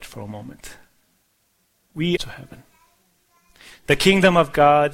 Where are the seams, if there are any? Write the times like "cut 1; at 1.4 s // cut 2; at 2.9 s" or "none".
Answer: cut 1; at 2.2 s